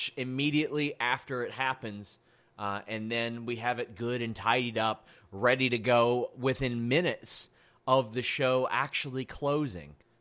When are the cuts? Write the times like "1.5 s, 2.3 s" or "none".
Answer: none